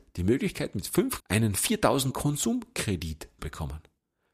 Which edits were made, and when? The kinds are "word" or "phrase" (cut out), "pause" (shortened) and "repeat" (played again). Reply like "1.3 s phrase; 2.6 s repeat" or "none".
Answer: 1.2 s word; 2.1 s word; 3.4 s word